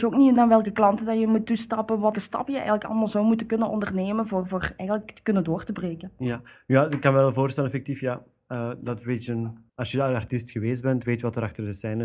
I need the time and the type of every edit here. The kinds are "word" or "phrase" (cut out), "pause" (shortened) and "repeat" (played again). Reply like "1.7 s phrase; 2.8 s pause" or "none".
2.1 s phrase; 9.7 s pause